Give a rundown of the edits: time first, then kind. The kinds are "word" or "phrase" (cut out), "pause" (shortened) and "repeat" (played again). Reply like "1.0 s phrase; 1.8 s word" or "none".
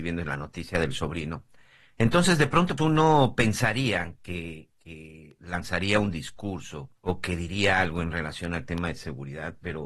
2.8 s word; 7.0 s pause